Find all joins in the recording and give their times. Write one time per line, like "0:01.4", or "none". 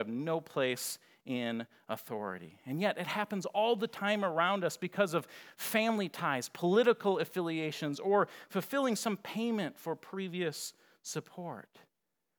none